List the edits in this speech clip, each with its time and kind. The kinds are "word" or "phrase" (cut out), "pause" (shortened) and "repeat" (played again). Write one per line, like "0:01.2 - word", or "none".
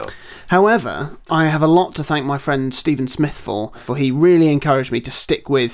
none

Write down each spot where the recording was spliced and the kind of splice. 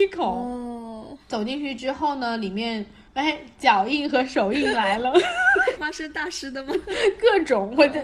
0:03.1 - pause
0:05.8 - word

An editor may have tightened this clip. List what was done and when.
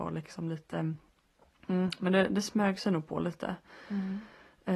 none

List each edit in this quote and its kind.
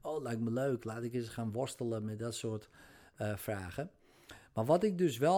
none

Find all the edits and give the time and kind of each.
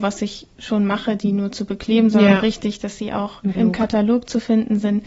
0:03.5 - word

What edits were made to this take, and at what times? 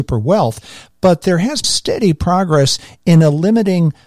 0:01.6 - word

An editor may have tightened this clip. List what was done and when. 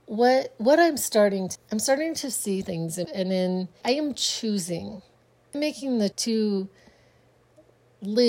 0:01.6 - word
0:02.6 - word
0:03.0 - word
0:03.8 - word
0:05.5 - word
0:06.1 - word

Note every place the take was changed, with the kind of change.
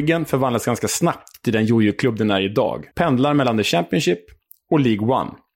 0:02.9 - pause

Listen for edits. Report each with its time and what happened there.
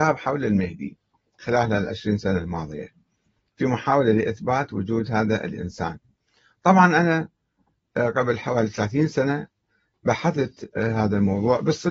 none

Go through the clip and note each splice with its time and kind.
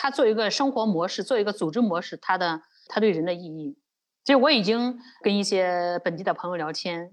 none

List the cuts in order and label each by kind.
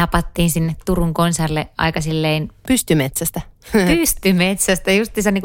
none

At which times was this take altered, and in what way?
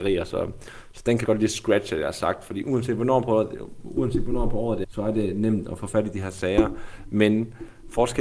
0:01.3 - phrase
0:04.8 - word

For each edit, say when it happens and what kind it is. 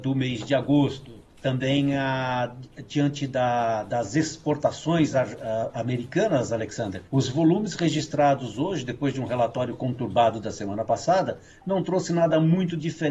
0:01.3 - pause
0:07.1 - pause

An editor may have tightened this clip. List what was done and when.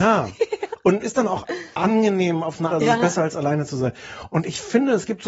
0:01.0 - word
0:02.7 - word

